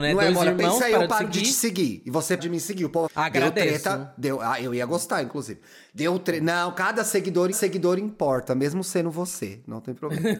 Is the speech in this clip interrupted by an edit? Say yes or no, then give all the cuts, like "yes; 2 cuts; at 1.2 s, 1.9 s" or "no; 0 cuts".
yes; 3 cuts; at 2.4 s, 3.1 s, 7.5 s